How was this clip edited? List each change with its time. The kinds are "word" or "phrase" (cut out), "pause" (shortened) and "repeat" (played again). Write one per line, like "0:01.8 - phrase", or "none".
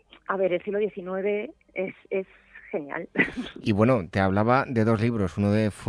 none

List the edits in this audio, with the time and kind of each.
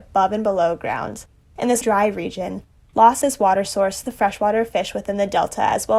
0:01.3 - pause
0:01.8 - word
0:03.2 - word
0:04.0 - word

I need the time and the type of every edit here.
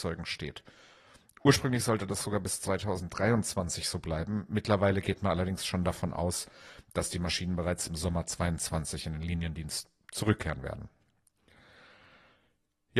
none

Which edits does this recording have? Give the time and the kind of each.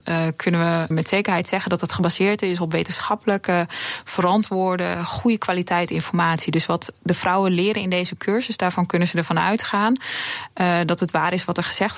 0:00.9 - word

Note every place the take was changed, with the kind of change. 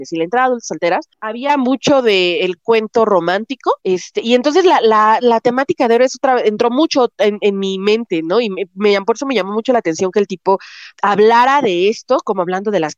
0:01.1 - pause
0:03.8 - pause
0:10.9 - pause

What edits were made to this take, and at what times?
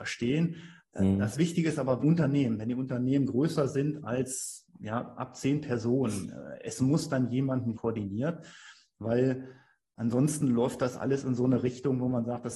0:02.0 - phrase
0:07.7 - phrase

